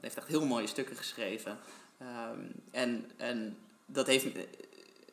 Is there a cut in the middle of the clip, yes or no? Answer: no